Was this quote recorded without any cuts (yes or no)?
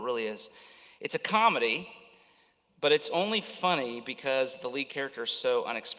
yes